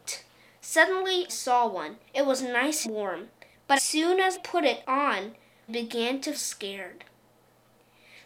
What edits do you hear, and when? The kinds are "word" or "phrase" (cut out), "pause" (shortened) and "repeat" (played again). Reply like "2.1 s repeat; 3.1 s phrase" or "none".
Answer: 1.3 s word; 2.1 s pause; 2.8 s word; 3.8 s word; 4.3 s word; 5.7 s word; 6.3 s word